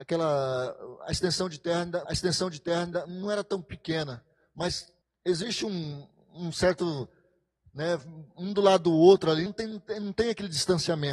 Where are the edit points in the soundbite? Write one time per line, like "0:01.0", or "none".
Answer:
0:02.1
0:05.0
0:09.5